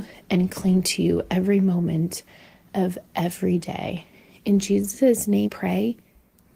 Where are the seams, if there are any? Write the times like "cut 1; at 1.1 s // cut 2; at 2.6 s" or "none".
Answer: cut 1; at 5.5 s